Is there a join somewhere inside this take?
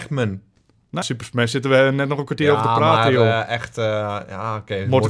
yes; 1 cut; at 1.0 s

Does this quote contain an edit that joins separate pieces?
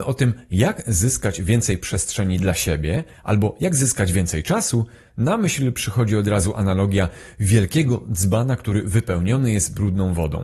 no; 0 cuts

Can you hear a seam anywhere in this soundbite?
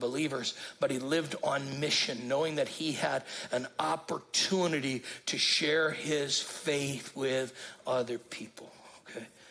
no; 0 cuts

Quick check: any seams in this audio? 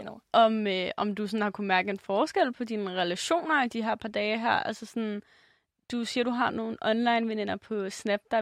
no; 0 cuts

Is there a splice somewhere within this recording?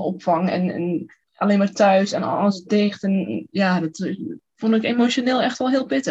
yes; 1 cut; at 1.2 s

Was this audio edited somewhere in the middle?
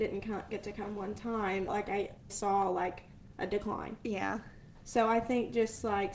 yes; 2 cuts; at 1.7 s, 2.3 s

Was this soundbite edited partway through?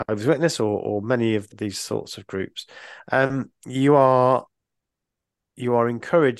yes; 1 cut; at 1.5 s

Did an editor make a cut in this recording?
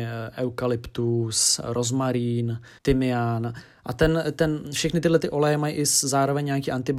yes; 1 cut; at 2.8 s

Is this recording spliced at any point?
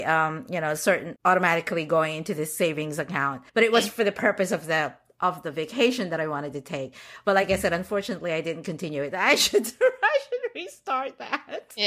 yes; 2 cuts; at 1.2 s, 3.5 s

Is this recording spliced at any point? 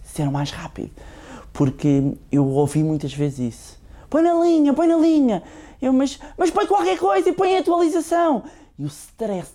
no; 0 cuts

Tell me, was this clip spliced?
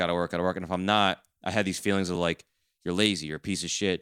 no; 0 cuts

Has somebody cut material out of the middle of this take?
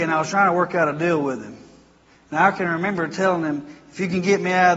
no; 0 cuts

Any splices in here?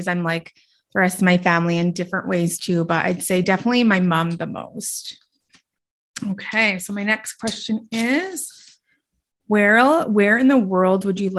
no; 0 cuts

